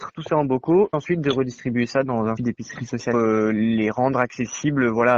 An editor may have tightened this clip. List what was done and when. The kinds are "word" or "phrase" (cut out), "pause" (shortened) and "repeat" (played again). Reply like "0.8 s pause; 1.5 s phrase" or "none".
0.9 s word; 2.4 s word; 3.1 s phrase